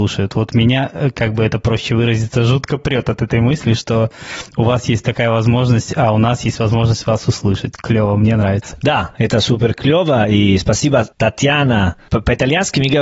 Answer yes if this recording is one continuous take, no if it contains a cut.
yes